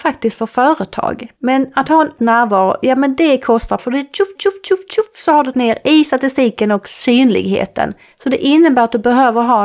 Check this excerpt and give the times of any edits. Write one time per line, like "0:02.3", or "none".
0:01.4
0:02.2
0:03.8
0:04.4
0:05.5